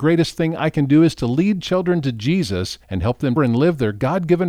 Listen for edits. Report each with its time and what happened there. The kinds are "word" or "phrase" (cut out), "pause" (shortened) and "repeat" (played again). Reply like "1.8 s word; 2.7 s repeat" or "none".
2.8 s pause; 3.4 s word